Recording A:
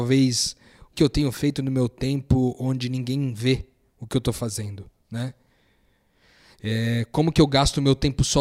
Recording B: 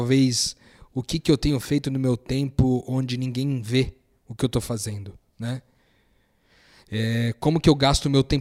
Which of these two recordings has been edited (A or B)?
A